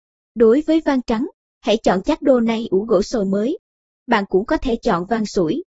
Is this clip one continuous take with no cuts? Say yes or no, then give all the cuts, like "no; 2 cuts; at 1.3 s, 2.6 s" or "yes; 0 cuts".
yes; 0 cuts